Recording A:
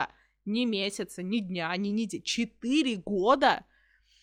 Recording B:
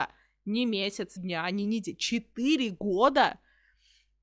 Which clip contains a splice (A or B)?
B